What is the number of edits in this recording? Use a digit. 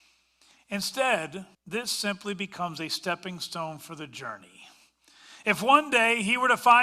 1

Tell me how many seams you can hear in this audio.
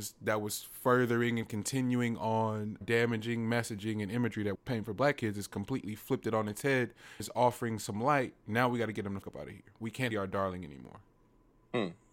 5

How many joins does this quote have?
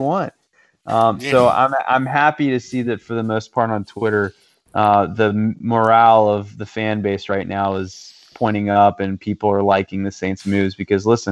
0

